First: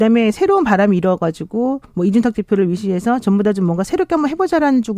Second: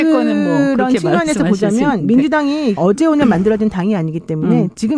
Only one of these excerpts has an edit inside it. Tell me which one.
second; 1 cut; at 2.8 s

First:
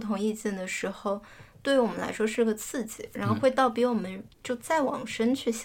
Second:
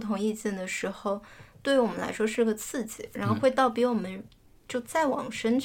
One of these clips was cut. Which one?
first; 1 cut; at 4.3 s

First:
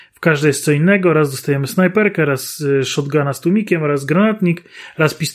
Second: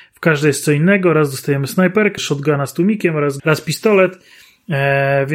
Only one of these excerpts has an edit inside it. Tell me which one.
second; 2 cuts; at 2.2 s, 3.4 s

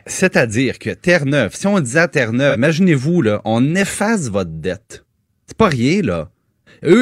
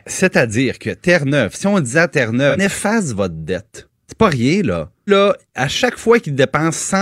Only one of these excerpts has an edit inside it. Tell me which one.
second; 3 cuts; at 2.6 s, 4.0 s, 5.1 s

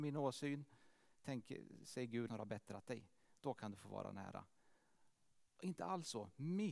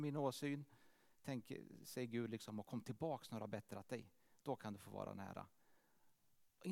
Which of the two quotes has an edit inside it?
first; 1 cut; at 2.3 s

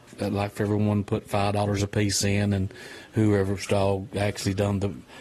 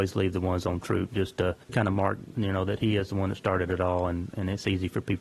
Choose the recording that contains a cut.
second; 1 cut; at 1.6 s

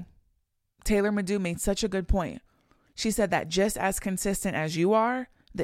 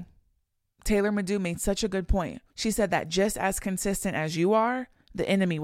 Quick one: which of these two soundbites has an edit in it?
second; 1 cut; at 2.5 s

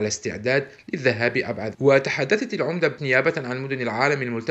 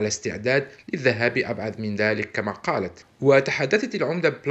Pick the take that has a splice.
first; 2 cuts; at 1.7 s, 3.0 s

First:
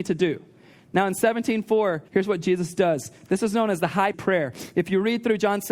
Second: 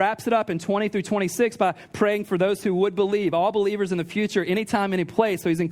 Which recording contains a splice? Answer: first; 2 cuts; at 2.1 s, 4.1 s

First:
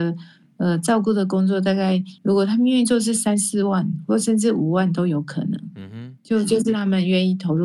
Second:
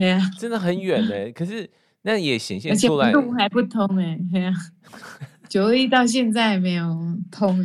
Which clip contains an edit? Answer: first; 1 cut; at 2.2 s

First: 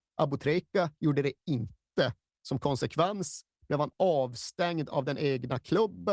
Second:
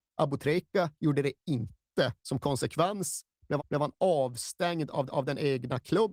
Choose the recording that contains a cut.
second; 3 cuts; at 2.2 s, 3.6 s, 5.1 s

